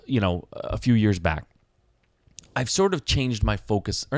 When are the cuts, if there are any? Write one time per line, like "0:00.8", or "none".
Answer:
none